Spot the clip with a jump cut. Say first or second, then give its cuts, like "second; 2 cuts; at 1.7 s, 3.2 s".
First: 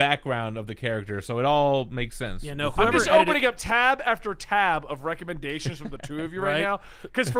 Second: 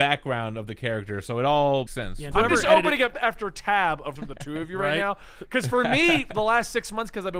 second; 4 cuts; at 1.9 s, 2.3 s, 3.1 s, 4.2 s